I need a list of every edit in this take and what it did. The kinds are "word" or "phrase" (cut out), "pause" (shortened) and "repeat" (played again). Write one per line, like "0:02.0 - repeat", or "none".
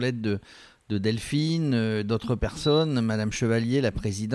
none